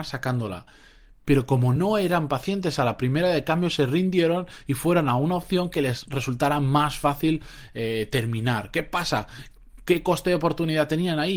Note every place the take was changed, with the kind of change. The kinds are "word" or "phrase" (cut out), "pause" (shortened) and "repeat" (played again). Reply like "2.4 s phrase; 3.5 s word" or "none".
none